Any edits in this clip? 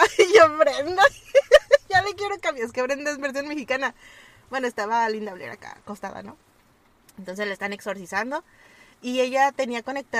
no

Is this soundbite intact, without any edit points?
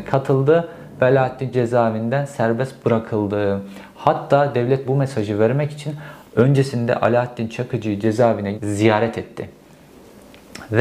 no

